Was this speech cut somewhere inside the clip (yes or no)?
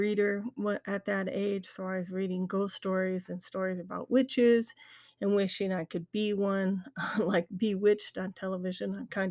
no